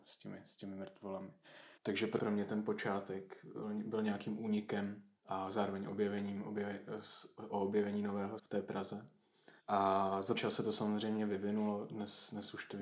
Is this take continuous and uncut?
no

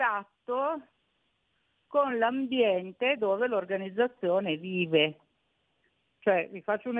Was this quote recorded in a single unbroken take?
yes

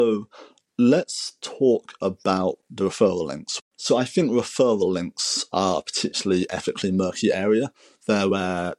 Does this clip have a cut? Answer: no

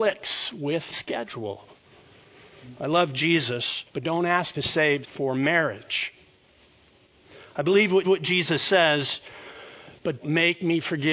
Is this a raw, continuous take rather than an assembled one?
no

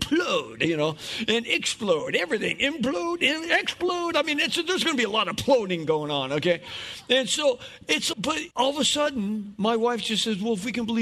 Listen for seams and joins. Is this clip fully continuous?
no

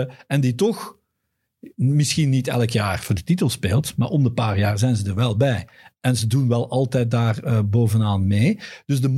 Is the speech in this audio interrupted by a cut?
no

